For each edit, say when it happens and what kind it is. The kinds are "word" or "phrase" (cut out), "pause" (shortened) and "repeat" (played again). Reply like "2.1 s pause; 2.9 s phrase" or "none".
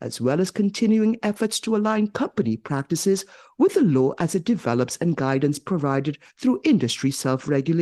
none